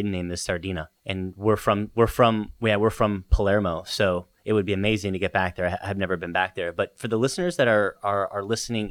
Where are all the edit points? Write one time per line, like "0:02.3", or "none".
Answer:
0:01.0